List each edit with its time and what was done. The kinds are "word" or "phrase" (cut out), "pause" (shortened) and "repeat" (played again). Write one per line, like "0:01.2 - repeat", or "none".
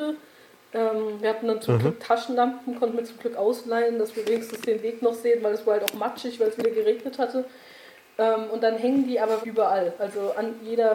0:09.4 - word